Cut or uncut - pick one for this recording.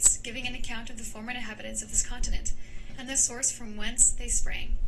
uncut